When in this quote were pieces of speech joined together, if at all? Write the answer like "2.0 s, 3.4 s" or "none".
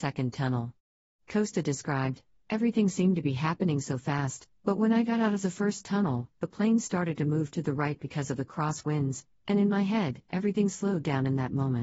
none